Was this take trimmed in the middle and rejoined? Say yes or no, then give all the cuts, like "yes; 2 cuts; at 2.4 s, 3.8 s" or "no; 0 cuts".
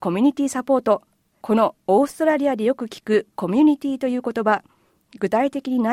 no; 0 cuts